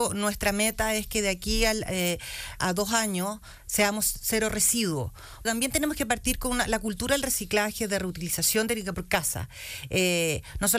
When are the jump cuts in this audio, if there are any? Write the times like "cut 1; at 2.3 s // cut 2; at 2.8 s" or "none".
cut 1; at 2.6 s // cut 2; at 5.4 s // cut 3; at 8.9 s